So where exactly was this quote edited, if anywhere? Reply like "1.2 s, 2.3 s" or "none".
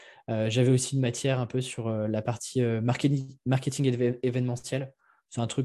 none